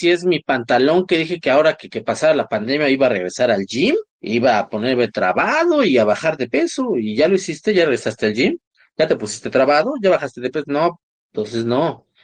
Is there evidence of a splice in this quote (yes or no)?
yes